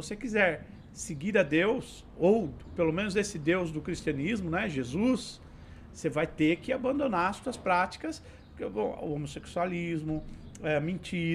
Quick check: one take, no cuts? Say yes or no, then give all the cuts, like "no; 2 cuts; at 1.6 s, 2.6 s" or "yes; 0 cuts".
yes; 0 cuts